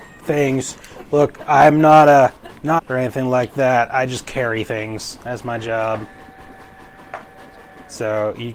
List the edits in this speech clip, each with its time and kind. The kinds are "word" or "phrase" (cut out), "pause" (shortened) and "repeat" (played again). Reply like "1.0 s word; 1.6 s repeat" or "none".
2.8 s phrase